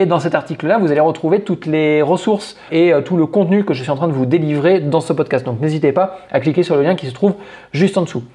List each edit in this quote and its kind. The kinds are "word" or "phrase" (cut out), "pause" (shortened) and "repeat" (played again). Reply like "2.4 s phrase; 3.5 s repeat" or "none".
2.7 s word